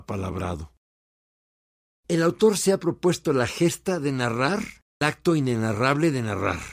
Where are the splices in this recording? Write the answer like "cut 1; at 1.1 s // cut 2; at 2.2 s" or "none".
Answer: cut 1; at 5.0 s

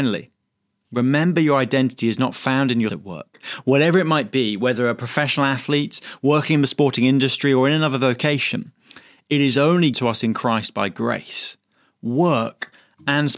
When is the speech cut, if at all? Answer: cut 1; at 2.9 s // cut 2; at 9.9 s

